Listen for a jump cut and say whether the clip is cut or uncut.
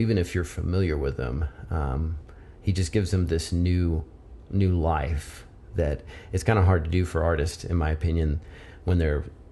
uncut